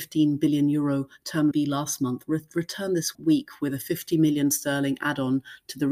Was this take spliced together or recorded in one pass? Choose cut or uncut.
cut